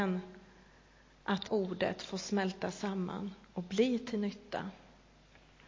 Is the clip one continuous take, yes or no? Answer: no